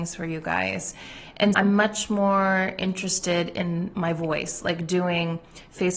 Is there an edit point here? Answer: yes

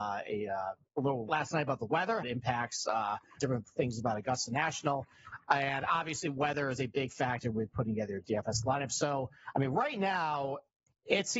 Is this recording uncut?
no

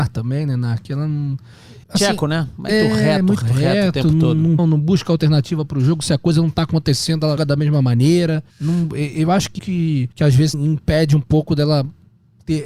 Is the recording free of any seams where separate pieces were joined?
no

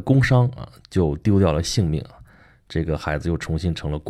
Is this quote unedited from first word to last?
yes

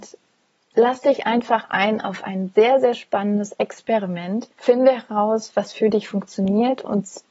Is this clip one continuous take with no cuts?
no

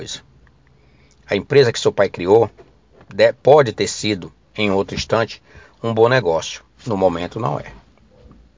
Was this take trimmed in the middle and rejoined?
no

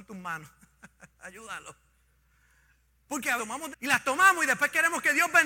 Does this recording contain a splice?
yes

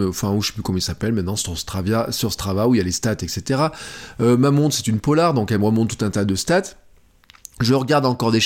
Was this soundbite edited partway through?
no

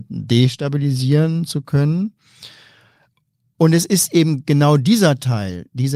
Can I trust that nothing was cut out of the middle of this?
yes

